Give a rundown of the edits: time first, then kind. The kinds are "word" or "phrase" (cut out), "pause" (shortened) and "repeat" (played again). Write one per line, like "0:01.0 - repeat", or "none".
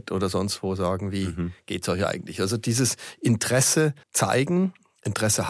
0:04.0 - pause